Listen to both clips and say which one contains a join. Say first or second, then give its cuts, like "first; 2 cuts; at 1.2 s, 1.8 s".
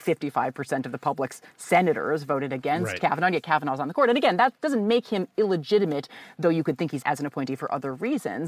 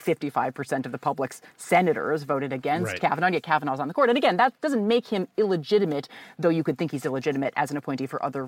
first; 1 cut; at 7.0 s